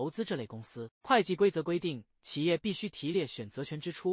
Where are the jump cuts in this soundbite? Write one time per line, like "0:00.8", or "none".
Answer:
0:01.0

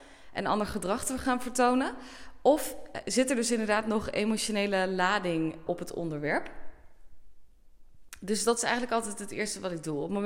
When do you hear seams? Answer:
0:05.7

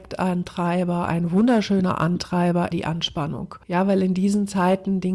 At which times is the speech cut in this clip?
0:02.7
0:03.6

